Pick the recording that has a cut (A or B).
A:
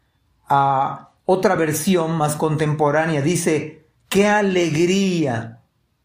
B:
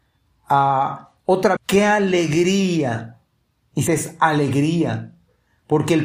B